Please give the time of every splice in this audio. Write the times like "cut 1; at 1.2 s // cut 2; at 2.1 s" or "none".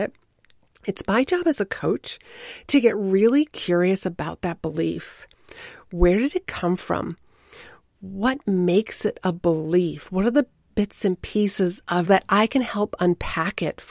cut 1; at 12.0 s